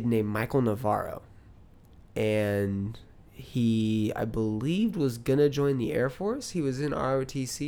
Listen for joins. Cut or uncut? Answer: uncut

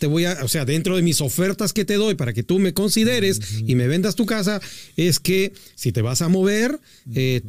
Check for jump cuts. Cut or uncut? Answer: uncut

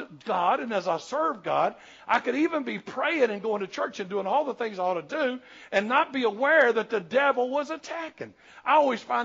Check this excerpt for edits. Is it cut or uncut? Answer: uncut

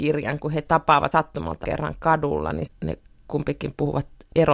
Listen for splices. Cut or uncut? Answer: cut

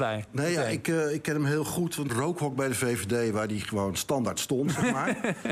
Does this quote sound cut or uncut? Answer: cut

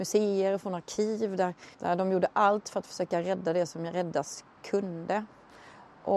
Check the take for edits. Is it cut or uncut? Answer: cut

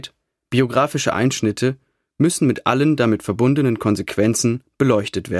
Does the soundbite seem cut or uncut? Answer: uncut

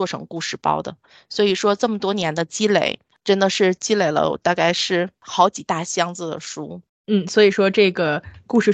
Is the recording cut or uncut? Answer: uncut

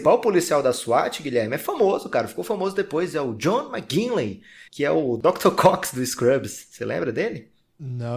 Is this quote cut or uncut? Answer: cut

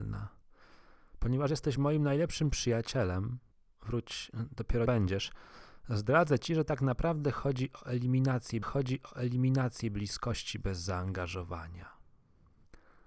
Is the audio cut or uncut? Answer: cut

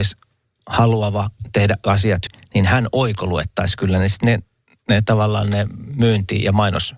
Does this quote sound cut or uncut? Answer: cut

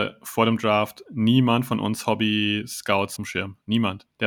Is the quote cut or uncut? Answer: cut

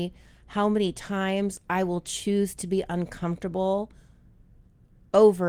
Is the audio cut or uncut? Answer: uncut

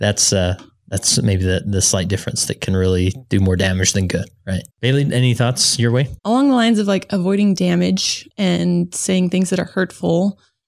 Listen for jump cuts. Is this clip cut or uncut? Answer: cut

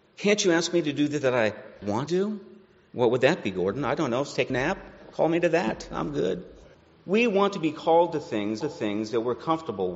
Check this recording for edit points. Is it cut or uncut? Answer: cut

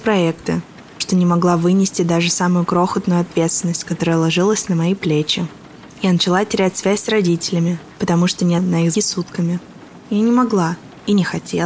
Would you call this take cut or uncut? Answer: cut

